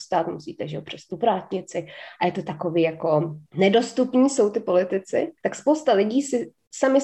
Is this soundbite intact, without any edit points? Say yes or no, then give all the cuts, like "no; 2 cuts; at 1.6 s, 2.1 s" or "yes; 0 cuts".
no; 2 cuts; at 3.5 s, 5.4 s